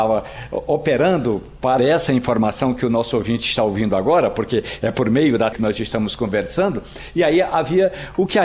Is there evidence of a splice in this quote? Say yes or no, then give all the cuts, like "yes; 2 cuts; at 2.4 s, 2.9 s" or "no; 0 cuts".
yes; 2 cuts; at 1.8 s, 5.5 s